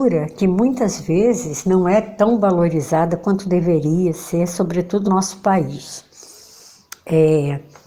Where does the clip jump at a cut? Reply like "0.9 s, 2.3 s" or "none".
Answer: 5.1 s